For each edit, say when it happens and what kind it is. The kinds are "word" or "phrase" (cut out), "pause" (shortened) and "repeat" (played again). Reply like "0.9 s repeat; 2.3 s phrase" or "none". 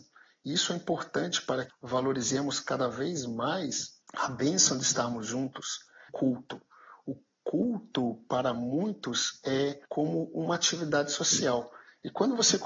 1.7 s word; 4.0 s pause; 6.1 s word; 9.8 s pause